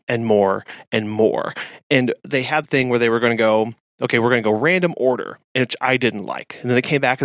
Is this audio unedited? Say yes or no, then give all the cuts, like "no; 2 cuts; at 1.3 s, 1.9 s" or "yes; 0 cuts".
no; 1 cut; at 2.6 s